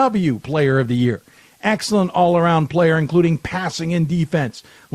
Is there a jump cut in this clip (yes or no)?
no